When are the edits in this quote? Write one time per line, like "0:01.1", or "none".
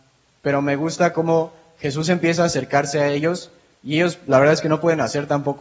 none